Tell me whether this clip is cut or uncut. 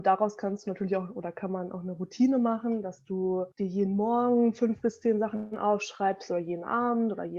cut